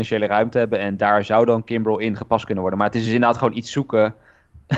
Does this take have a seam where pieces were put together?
no; 0 cuts

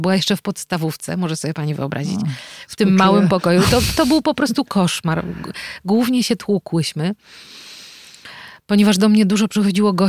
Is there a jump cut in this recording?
no; 0 cuts

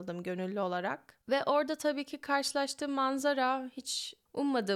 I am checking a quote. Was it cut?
yes; 1 cut; at 1.2 s

